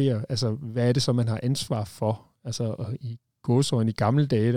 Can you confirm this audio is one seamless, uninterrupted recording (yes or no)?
yes